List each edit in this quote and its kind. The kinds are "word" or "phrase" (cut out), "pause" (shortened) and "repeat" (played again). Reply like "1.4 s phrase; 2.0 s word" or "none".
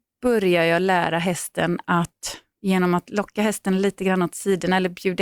none